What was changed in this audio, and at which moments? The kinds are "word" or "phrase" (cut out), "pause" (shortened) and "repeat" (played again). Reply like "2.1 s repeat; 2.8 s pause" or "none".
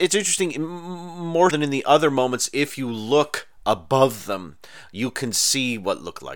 1.5 s word